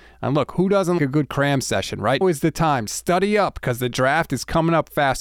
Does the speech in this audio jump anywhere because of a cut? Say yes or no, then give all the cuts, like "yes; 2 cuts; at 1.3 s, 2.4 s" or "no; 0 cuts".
yes; 2 cuts; at 1.0 s, 2.2 s